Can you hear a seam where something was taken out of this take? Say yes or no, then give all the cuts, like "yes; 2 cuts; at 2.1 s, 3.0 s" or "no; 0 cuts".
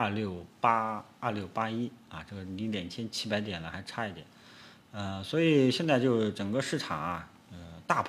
no; 0 cuts